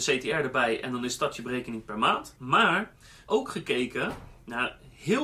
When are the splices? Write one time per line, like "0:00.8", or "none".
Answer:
0:03.3